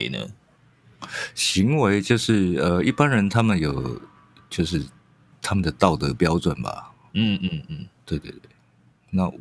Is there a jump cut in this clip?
no; 0 cuts

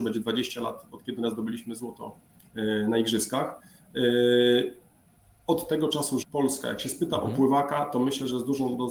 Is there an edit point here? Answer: yes; 2 cuts; at 1.2 s, 6.2 s

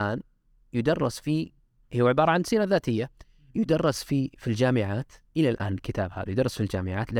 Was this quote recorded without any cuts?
yes; 0 cuts

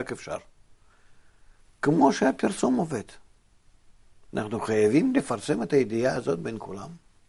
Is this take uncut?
yes; 0 cuts

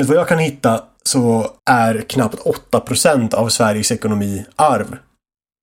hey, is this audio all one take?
no; 1 cut; at 1.6 s

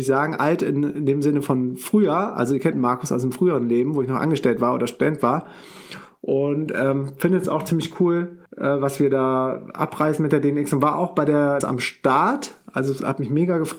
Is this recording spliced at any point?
yes; 3 cuts; at 2.7 s, 8.5 s, 11.6 s

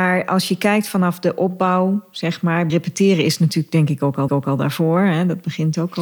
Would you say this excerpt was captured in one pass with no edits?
no; 2 cuts; at 2.7 s, 4.3 s

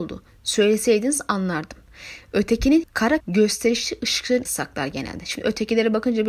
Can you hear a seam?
yes; 3 cuts; at 2.8 s, 3.2 s, 4.5 s

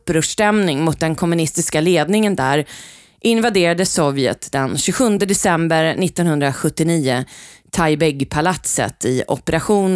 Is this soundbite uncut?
yes; 0 cuts

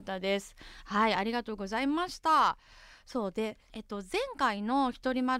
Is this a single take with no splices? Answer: yes; 0 cuts

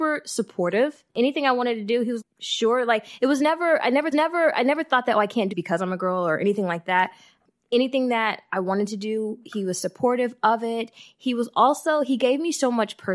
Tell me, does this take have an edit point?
yes; 4 cuts; at 1.1 s, 2.2 s, 4.1 s, 5.5 s

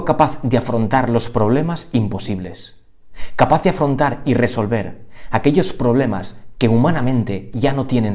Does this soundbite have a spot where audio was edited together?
no; 0 cuts

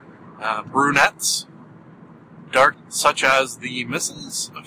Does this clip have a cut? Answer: yes; 1 cut; at 2.7 s

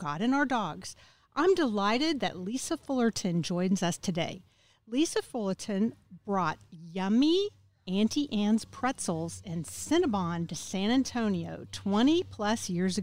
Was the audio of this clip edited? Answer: no; 0 cuts

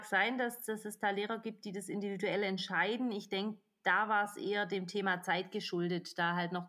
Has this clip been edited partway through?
no; 0 cuts

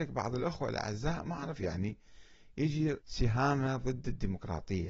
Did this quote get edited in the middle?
yes; 2 cuts; at 1.6 s, 3.0 s

